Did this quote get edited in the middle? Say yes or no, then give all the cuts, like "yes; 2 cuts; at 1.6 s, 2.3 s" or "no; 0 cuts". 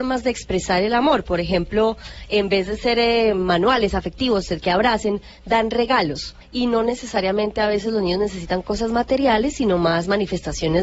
yes; 1 cut; at 6.4 s